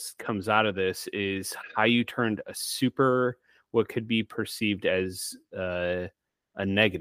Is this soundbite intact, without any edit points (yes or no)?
yes